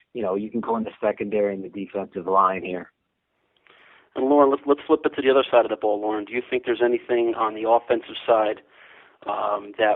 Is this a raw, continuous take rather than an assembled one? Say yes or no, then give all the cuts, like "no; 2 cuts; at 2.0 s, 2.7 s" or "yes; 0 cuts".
yes; 0 cuts